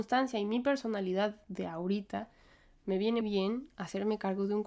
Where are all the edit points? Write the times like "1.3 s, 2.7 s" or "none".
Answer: 3.2 s